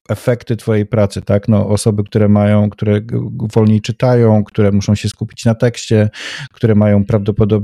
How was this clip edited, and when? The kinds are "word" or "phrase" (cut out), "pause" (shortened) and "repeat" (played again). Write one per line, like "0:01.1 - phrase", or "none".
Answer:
none